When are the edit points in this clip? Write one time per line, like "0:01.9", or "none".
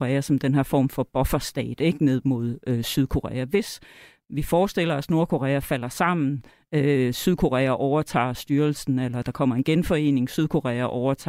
none